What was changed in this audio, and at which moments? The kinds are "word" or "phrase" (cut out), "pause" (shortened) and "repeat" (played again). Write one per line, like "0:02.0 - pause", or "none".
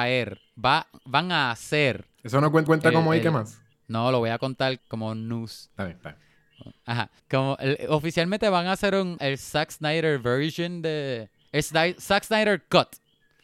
0:02.7 - repeat
0:03.7 - pause
0:04.8 - word
0:07.2 - pause
0:09.2 - word

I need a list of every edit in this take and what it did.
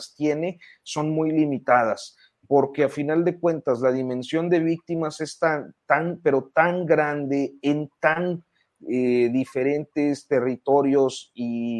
none

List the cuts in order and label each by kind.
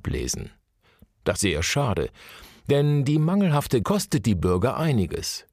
0:01.4 - word
0:03.8 - word

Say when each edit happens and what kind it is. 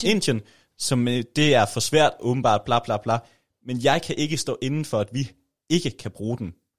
none

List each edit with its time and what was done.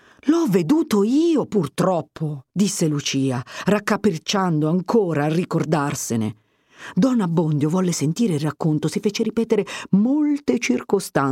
0:02.5 - pause

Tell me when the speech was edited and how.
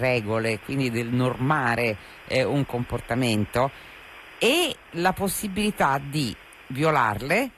0:04.8 - pause

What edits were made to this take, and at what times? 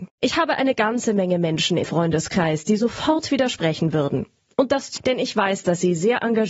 0:01.8 - word
0:05.0 - word

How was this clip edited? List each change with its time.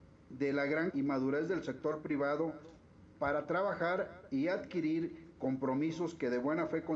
0:00.9 - word

